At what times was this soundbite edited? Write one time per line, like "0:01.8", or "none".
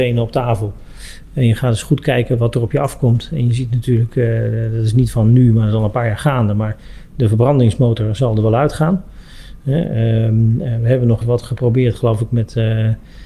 0:11.2